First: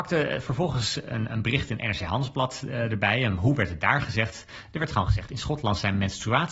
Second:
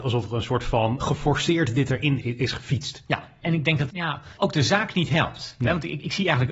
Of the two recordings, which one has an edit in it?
second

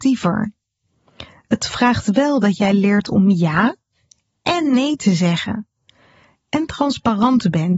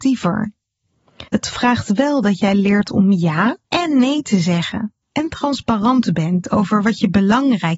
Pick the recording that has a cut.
second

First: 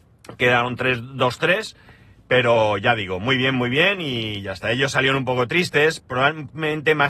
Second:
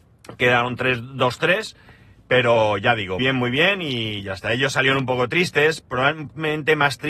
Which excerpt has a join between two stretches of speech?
second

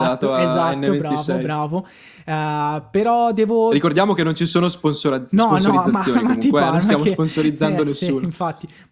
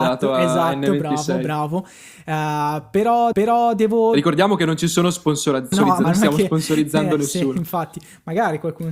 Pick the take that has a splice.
second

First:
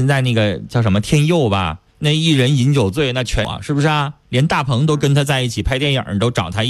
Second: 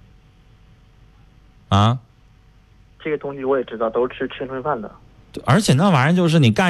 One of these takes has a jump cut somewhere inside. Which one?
first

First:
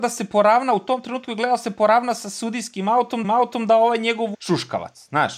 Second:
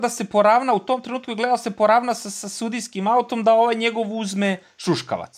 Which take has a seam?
first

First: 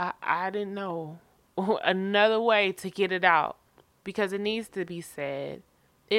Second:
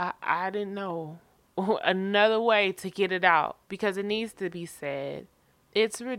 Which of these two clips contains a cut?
second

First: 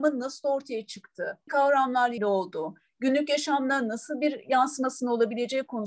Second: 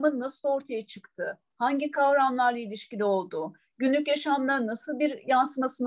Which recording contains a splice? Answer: first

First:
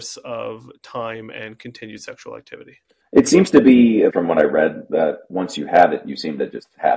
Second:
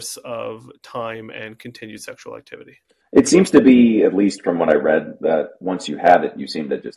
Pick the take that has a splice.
first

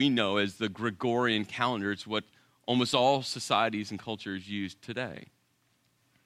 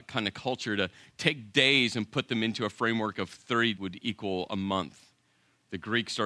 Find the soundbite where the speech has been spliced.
second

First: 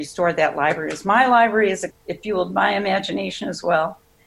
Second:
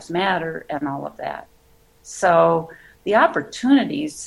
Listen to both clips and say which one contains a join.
first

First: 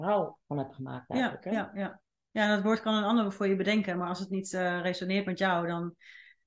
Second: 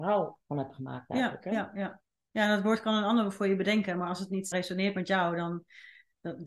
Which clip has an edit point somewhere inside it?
second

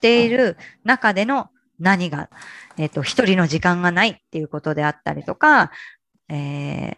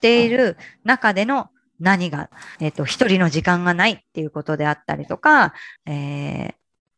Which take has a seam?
second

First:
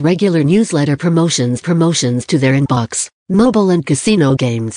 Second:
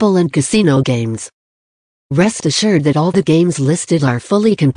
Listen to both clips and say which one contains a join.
first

